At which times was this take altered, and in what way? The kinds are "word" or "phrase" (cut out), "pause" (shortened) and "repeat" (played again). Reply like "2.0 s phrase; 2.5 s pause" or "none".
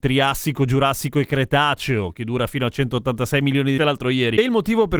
3.8 s phrase